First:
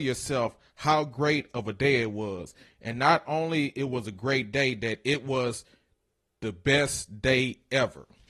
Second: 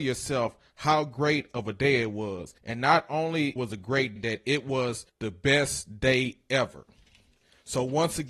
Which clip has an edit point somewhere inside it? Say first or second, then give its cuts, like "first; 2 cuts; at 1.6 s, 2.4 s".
second; 4 cuts; at 2.6 s, 3.6 s, 4.2 s, 5.1 s